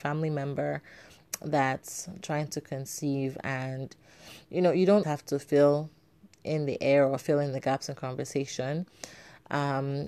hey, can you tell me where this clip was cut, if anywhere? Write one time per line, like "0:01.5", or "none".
0:05.0